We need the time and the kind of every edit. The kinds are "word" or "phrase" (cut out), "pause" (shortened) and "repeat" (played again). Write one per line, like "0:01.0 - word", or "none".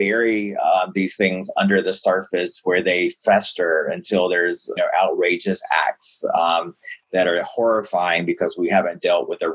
0:04.8 - word